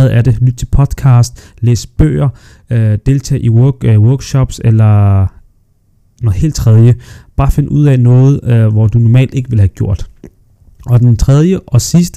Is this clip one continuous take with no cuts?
yes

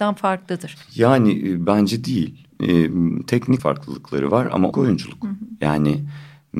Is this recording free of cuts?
no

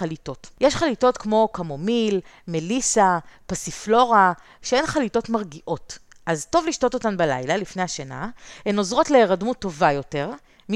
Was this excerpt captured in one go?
yes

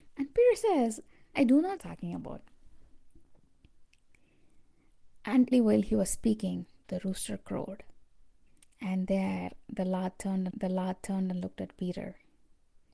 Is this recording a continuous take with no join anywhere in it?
no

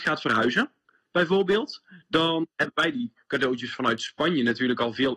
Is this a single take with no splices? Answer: yes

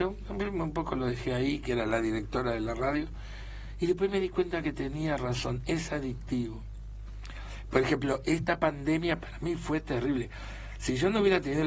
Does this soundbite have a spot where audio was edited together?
no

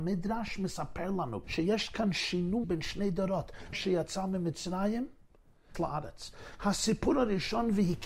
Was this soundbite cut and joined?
yes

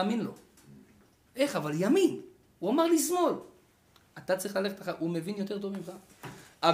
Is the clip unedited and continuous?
yes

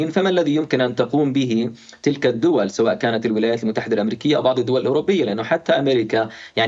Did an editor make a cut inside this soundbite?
no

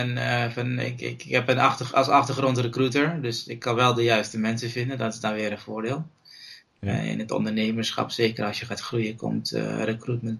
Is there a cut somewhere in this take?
no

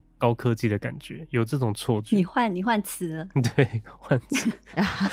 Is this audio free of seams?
yes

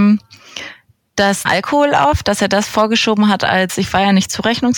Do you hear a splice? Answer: yes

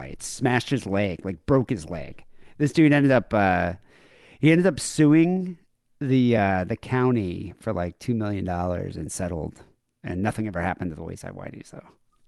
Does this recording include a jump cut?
no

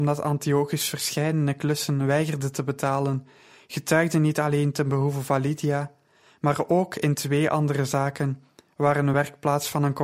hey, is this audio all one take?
yes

